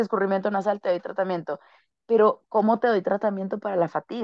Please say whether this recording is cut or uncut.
uncut